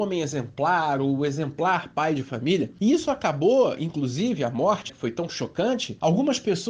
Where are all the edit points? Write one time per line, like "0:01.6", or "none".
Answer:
0:04.9